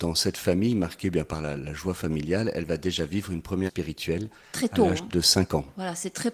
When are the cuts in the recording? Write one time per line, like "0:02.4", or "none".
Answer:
0:01.6
0:03.7